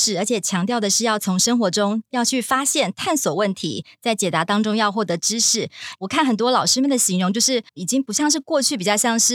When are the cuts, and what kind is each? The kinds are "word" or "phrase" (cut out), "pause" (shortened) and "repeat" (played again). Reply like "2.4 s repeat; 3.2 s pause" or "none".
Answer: 7.7 s pause